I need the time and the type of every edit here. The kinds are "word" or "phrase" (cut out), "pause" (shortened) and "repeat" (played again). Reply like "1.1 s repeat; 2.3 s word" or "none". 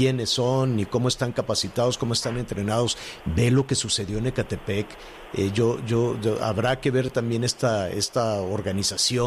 none

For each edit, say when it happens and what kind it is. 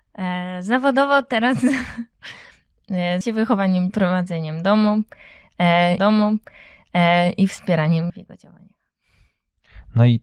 3.2 s word; 3.9 s word; 6.0 s repeat; 8.1 s word

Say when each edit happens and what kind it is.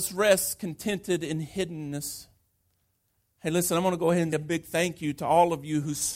4.3 s word

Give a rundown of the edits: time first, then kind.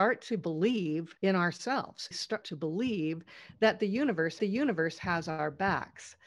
1.2 s pause; 2.1 s phrase; 2.4 s phrase; 4.4 s repeat

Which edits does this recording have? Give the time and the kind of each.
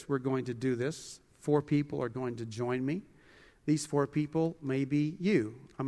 none

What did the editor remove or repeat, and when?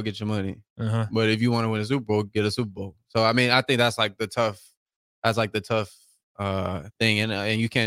none

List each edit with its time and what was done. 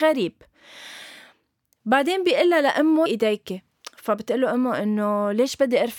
3.1 s phrase

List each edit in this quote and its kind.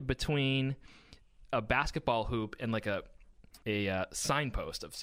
3.6 s pause

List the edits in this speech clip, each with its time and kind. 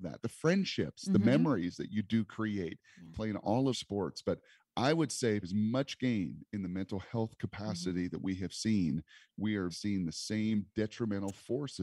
3.7 s phrase; 5.4 s word; 9.7 s word

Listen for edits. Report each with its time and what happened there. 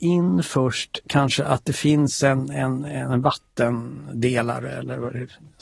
none

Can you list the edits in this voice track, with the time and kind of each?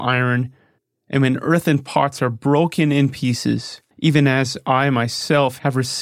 3.9 s pause

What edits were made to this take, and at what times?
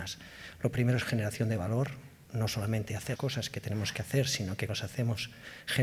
3.2 s word; 4.7 s word

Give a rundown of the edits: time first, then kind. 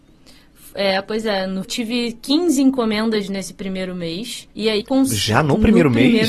1.6 s phrase; 4.5 s pause; 4.8 s word

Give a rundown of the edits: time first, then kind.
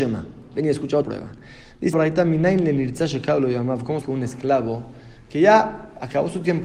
1.0 s word; 1.9 s word; 4.0 s word

